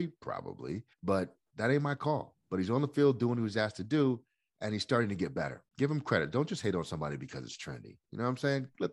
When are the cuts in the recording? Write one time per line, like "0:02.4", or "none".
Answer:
0:00.9
0:02.4
0:05.7